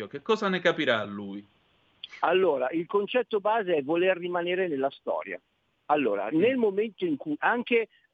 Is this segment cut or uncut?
uncut